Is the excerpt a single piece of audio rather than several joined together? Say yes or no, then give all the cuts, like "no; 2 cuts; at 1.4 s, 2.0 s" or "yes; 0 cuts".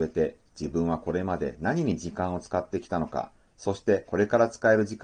yes; 0 cuts